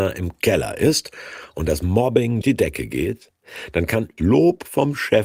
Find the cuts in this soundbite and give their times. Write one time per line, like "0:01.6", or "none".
0:02.4
0:04.2